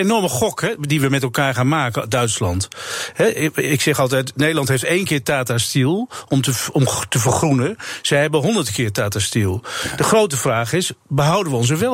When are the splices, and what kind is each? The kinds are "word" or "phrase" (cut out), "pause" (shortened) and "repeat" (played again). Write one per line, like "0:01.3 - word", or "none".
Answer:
none